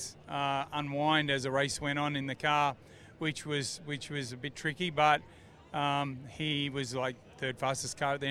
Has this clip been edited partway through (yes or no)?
no